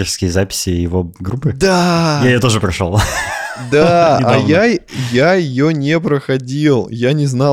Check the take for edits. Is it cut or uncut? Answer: uncut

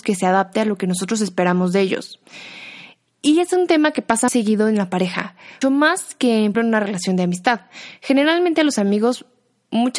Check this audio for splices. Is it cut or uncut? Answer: cut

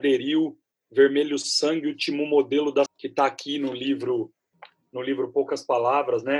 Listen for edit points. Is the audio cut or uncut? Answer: cut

